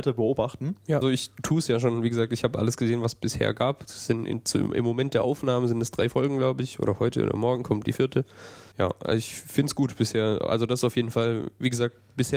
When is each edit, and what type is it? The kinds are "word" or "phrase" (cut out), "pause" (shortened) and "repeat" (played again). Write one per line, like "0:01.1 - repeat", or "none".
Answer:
0:01.0 - word
0:08.7 - pause

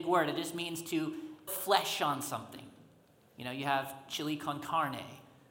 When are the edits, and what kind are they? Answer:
0:01.5 - word

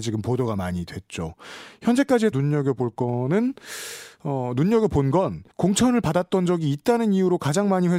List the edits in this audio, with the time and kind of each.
0:02.3 - word
0:05.5 - pause

